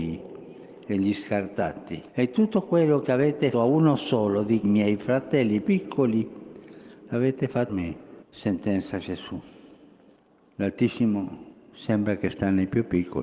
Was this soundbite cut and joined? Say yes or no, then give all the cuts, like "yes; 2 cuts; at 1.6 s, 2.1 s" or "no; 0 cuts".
yes; 7 cuts; at 2.1 s, 3.5 s, 4.6 s, 5.6 s, 7.7 s, 8.2 s, 11.5 s